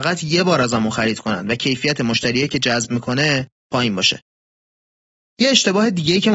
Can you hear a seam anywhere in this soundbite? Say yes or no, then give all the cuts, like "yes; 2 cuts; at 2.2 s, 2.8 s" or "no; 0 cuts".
no; 0 cuts